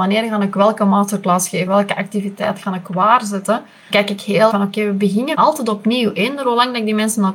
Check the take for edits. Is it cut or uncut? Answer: cut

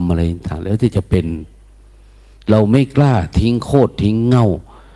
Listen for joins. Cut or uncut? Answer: uncut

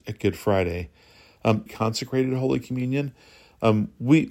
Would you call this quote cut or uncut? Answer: cut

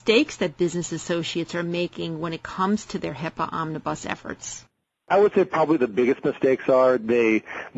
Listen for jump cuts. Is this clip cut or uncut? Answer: uncut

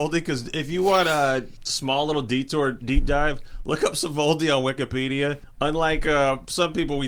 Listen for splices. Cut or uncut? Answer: uncut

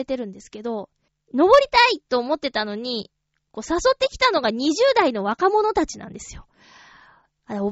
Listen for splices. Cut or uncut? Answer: cut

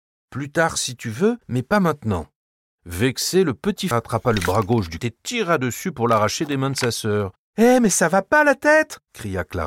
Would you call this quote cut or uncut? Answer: cut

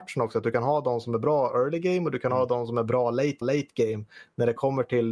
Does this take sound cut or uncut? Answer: cut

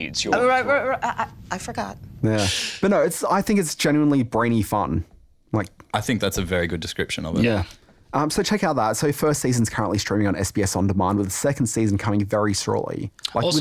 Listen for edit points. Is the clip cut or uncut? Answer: uncut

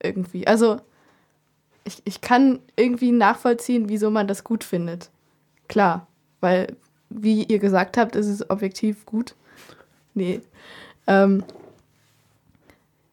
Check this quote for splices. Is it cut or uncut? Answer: uncut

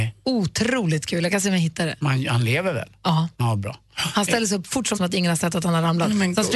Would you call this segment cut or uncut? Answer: cut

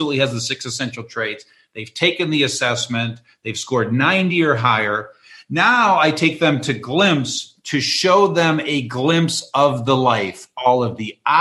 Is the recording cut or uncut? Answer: uncut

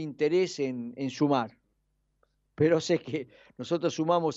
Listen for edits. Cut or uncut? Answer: uncut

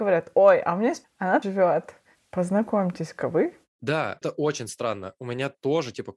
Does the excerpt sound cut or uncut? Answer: cut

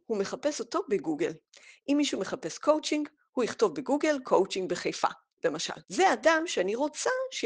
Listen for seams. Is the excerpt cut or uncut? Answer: cut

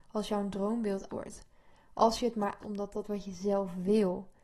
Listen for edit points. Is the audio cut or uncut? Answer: cut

